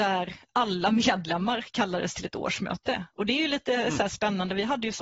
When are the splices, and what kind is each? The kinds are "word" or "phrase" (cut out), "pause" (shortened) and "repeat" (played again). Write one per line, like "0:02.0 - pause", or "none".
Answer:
none